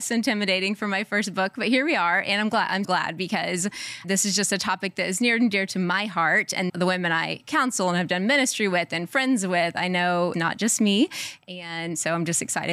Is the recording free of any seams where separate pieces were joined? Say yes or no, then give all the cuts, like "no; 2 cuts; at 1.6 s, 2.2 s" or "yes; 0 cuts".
no; 4 cuts; at 2.8 s, 4.0 s, 6.7 s, 10.3 s